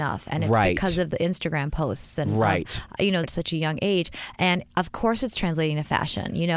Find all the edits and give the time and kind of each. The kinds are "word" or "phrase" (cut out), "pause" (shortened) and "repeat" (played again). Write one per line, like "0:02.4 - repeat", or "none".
0:03.2 - phrase